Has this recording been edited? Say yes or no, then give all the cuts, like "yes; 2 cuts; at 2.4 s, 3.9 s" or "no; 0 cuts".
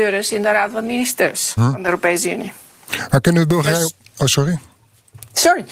yes; 1 cut; at 1.6 s